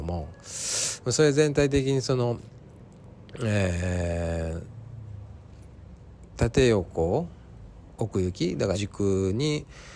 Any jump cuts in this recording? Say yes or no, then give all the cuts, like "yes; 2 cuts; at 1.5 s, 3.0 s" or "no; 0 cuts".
yes; 1 cut; at 8.7 s